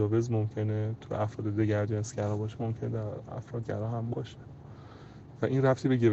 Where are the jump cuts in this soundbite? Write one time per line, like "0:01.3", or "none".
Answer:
0:03.6

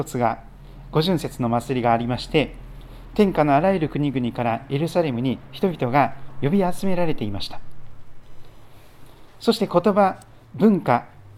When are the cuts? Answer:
0:10.4

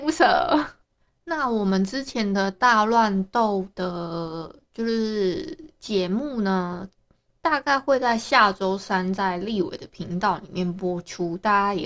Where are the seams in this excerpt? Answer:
none

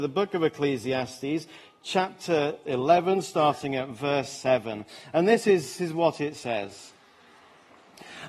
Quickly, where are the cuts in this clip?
0:05.8

